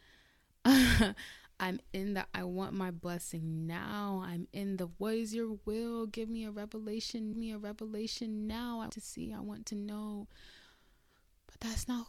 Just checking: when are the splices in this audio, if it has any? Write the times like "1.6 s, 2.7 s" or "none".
7.3 s, 8.9 s